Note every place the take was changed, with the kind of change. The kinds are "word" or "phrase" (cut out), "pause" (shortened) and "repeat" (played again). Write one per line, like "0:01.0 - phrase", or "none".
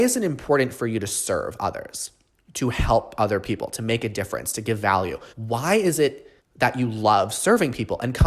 0:05.3 - pause
0:06.4 - pause